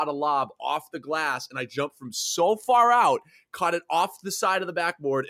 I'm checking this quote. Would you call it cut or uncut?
uncut